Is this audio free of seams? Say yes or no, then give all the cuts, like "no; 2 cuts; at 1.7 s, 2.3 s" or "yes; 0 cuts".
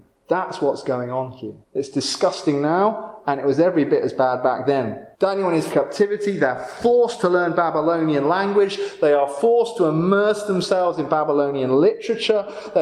no; 3 cuts; at 1.6 s, 5.1 s, 5.7 s